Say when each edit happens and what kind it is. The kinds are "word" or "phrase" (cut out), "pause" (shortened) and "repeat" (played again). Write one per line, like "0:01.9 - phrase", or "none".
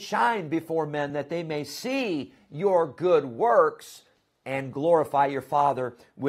none